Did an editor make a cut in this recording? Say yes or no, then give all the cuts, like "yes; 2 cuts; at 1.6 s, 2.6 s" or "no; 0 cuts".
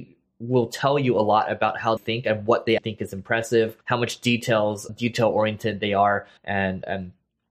yes; 5 cuts; at 2.0 s, 2.8 s, 3.8 s, 4.9 s, 6.4 s